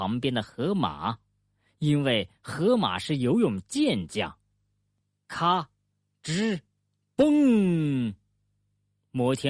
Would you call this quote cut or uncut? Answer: uncut